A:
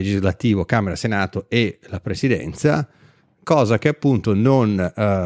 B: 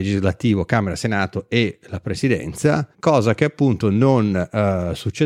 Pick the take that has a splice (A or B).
B